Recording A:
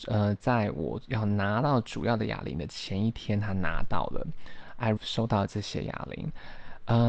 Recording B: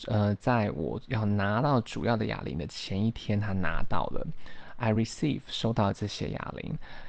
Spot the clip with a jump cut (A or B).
A